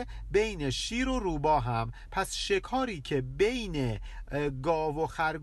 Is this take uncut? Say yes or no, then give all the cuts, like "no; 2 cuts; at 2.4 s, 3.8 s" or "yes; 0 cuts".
yes; 0 cuts